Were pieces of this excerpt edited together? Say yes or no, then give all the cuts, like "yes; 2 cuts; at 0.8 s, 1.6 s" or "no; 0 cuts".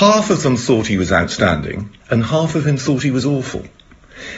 yes; 1 cut; at 2.0 s